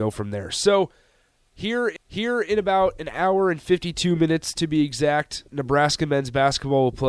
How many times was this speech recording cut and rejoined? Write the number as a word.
two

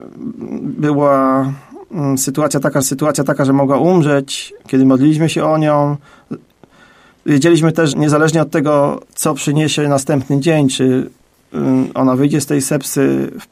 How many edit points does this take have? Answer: four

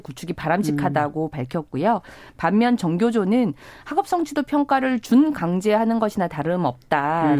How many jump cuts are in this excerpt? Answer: zero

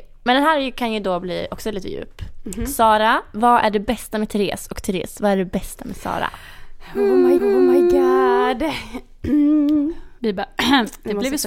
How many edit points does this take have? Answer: two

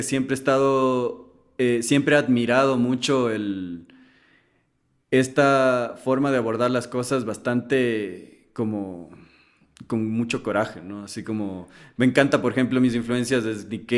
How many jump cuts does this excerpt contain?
zero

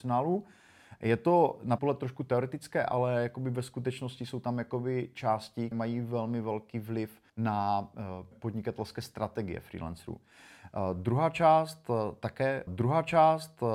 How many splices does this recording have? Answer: five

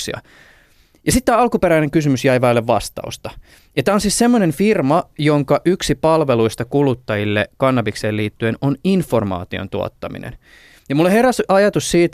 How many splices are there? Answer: zero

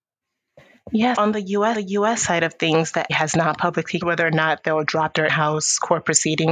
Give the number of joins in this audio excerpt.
five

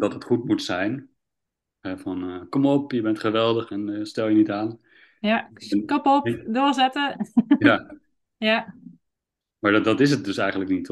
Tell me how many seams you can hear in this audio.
zero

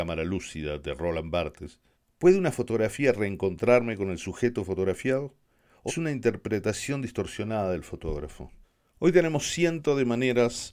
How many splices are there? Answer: three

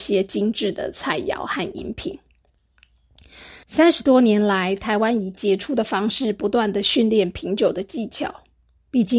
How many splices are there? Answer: one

